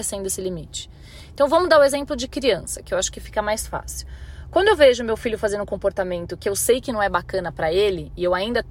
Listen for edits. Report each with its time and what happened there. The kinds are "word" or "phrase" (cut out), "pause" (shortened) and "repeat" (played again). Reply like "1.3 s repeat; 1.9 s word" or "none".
none